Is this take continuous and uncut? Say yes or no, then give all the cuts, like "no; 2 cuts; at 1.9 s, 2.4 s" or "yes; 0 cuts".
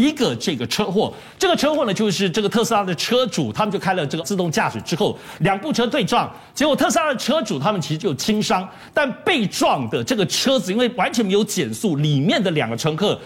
no; 1 cut; at 4.2 s